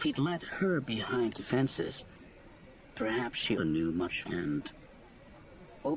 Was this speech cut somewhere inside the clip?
yes; 4 cuts; at 1.3 s, 2.9 s, 3.6 s, 4.2 s

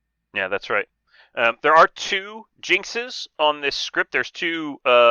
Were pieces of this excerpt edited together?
no; 0 cuts

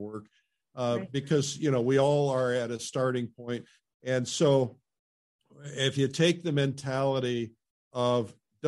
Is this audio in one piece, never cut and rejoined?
yes; 0 cuts

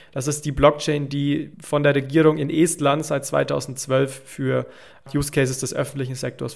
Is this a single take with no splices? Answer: no; 1 cut; at 1.5 s

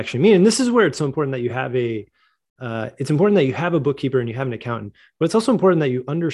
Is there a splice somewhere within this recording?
no; 0 cuts

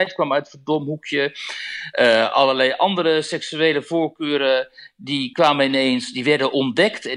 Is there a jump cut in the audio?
no; 0 cuts

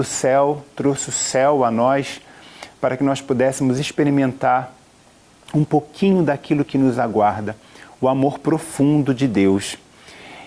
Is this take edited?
no; 0 cuts

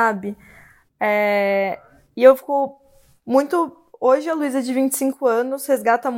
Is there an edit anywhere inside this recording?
no; 0 cuts

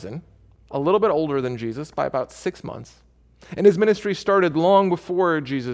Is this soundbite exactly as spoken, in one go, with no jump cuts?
yes; 0 cuts

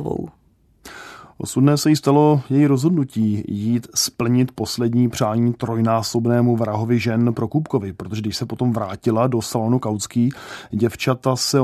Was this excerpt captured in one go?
yes; 0 cuts

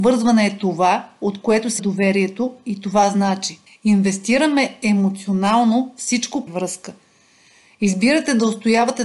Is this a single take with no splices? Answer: no; 3 cuts; at 1.8 s, 3.7 s, 6.5 s

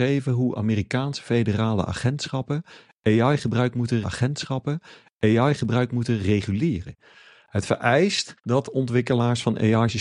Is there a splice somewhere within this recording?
yes; 2 cuts; at 4.0 s, 8.4 s

